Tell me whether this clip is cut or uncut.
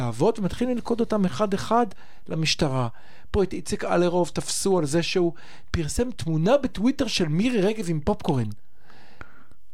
uncut